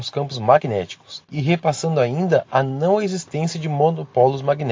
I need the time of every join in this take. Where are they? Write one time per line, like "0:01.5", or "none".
0:01.2